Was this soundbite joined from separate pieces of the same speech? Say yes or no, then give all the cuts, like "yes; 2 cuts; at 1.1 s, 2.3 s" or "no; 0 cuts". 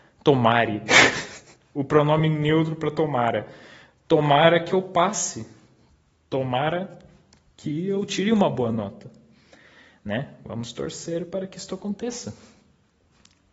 no; 0 cuts